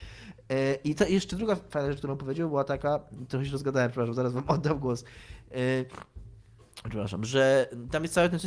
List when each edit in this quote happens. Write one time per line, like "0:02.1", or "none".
none